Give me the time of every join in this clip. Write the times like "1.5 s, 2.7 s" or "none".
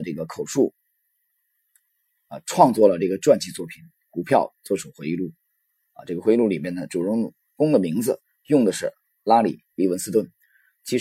none